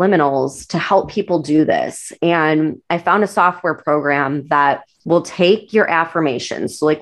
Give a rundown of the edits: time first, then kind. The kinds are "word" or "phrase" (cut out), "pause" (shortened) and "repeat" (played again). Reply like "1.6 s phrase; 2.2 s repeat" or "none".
4.9 s pause